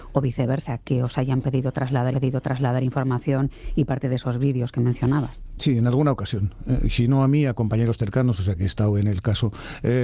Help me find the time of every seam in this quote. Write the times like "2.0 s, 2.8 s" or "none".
2.1 s